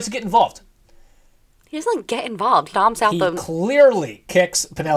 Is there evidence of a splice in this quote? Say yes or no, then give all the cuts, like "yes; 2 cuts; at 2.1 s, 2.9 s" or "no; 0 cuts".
yes; 1 cut; at 2.7 s